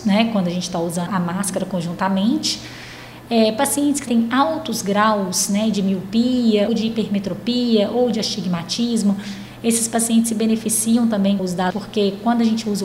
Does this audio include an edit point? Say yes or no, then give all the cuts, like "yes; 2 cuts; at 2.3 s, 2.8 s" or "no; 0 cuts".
yes; 5 cuts; at 1.1 s, 4.1 s, 6.7 s, 11.4 s, 11.7 s